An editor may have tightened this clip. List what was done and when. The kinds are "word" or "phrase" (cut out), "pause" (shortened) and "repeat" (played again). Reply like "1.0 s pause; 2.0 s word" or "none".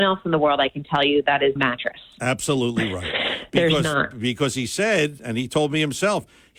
1.6 s phrase